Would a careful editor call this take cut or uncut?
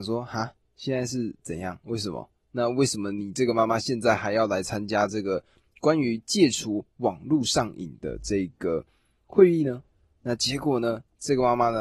uncut